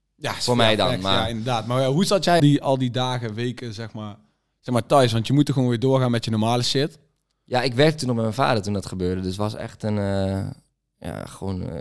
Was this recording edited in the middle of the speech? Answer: yes; 1 cut; at 2.4 s

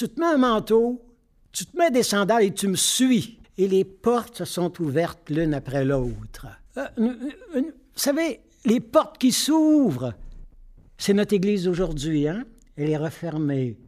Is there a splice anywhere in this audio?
yes; 2 cuts; at 3.4 s, 6.7 s

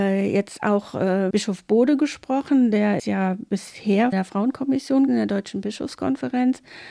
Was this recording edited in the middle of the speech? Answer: yes; 4 cuts; at 1.3 s, 3.0 s, 4.1 s, 5.1 s

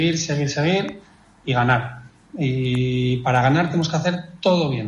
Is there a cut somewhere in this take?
no; 0 cuts

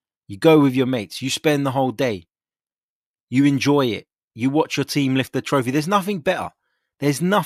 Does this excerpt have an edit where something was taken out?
no; 0 cuts

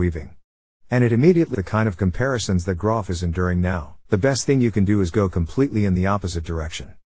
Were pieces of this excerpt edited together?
yes; 2 cuts; at 1.5 s, 4.1 s

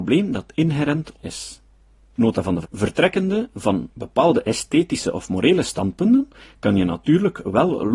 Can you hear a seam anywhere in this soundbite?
yes; 2 cuts; at 1.2 s, 2.6 s

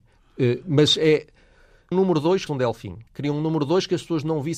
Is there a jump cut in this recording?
yes; 3 cuts; at 1.9 s, 2.5 s, 3.1 s

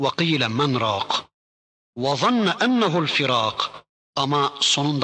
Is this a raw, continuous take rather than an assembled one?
yes; 0 cuts

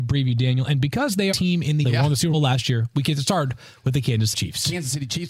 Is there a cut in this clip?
yes; 4 cuts; at 1.3 s, 1.8 s, 2.3 s, 4.3 s

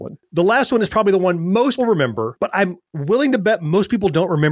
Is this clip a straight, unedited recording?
no; 1 cut; at 1.8 s

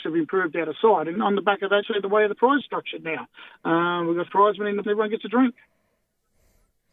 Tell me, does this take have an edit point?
yes; 5 cuts; at 1.2 s, 1.8 s, 2.6 s, 4.3 s, 4.8 s

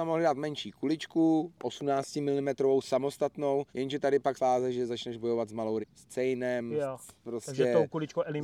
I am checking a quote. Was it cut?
yes; 3 cuts; at 3.7 s, 4.4 s, 5.8 s

